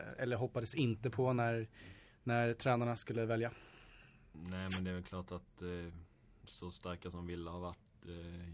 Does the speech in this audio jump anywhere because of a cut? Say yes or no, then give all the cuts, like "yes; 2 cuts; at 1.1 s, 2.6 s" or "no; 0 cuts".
no; 0 cuts